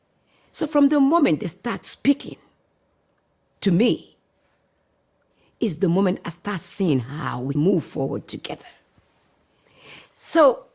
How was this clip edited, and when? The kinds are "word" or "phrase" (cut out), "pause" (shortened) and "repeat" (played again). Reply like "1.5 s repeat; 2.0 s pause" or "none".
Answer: 7.6 s word

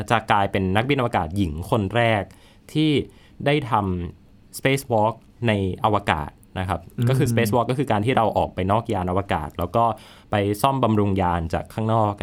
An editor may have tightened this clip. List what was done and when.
none

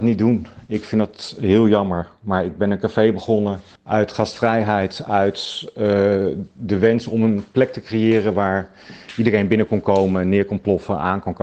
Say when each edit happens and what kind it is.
3.7 s pause

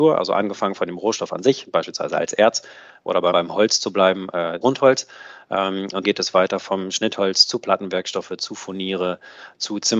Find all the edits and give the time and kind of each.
3.3 s word; 4.6 s word; 6.0 s word

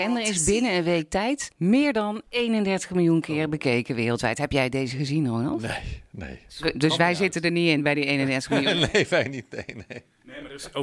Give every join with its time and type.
1.5 s pause; 2.3 s pause

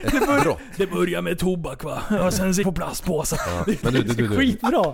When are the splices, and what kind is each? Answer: 2.6 s phrase; 3.8 s word

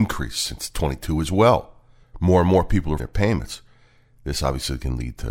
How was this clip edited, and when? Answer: 2.0 s pause; 3.0 s phrase

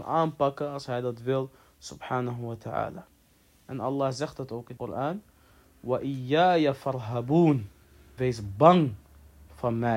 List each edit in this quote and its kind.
4.8 s word; 8.2 s word

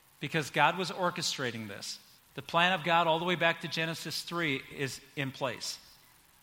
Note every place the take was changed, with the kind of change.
2.2 s pause

